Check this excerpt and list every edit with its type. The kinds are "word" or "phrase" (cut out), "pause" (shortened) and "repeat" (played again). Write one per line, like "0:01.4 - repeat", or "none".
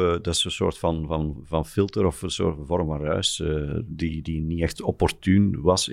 none